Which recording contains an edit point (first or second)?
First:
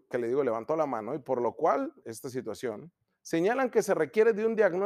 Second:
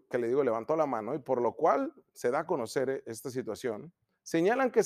first